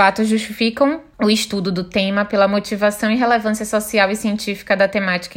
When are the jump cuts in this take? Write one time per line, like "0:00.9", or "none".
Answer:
0:01.1